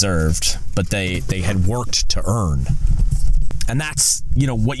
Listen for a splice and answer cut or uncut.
uncut